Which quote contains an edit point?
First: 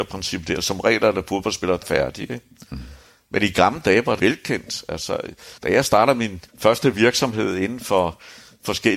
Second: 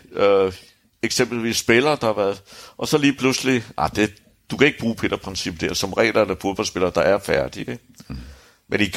first; 4 cuts; at 1.8 s, 4.2 s, 5.6 s, 6.5 s

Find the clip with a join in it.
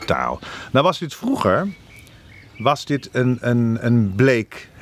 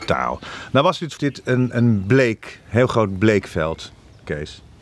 second; 2 cuts; at 1.2 s, 1.7 s

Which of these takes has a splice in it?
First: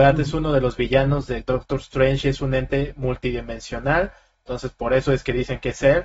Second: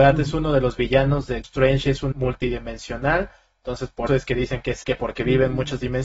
second; 4 cuts; at 1.4 s, 2.1 s, 4.1 s, 4.8 s

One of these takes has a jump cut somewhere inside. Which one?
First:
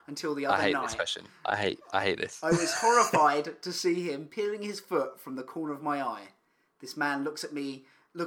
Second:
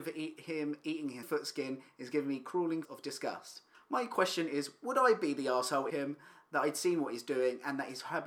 second; 4 cuts; at 1.2 s, 2.8 s, 3.7 s, 5.9 s

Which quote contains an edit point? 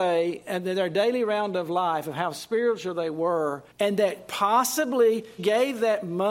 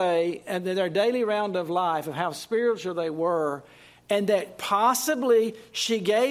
first; 2 cuts; at 3.7 s, 5.4 s

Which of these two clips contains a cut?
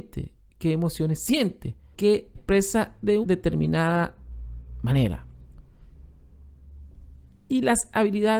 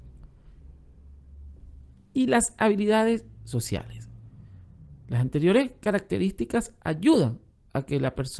first; 3 cuts; at 1.9 s, 2.4 s, 3.2 s

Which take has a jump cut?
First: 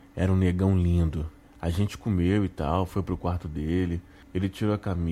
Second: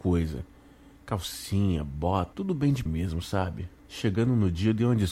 second; 2 cuts; at 2.3 s, 2.9 s

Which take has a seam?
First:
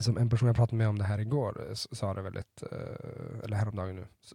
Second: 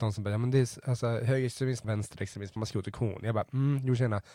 second; 2 cuts; at 1.8 s, 2.6 s

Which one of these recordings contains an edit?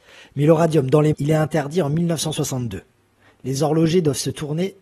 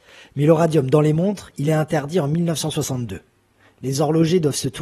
first; 1 cut; at 1.1 s

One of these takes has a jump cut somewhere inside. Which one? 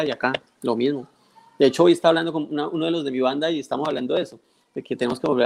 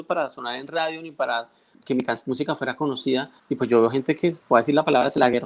second; 3 cuts; at 1.7 s, 3.4 s, 4.4 s

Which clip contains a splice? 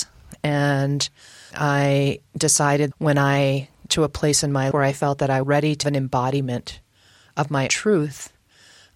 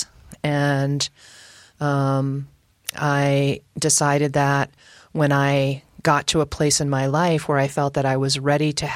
first; 7 cuts; at 1.5 s, 2.9 s, 3.9 s, 4.7 s, 5.4 s, 5.8 s, 7.7 s

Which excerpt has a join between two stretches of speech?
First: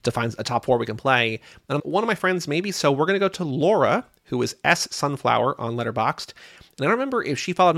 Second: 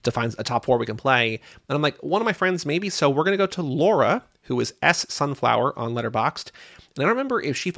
first; 1 cut; at 1.8 s

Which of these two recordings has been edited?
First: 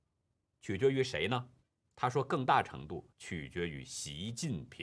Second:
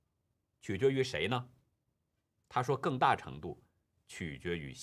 first; 2 cuts; at 1.6 s, 3.1 s

